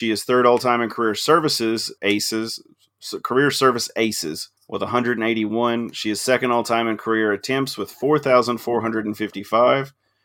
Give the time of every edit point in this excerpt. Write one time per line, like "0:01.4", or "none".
0:02.0
0:04.6